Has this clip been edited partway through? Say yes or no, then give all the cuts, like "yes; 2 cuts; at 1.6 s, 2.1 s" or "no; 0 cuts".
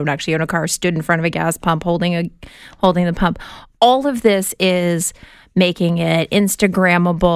no; 0 cuts